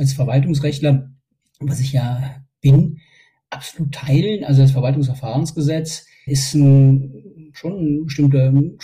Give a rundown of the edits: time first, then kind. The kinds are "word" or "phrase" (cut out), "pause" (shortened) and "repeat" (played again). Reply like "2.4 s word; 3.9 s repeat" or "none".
6.3 s word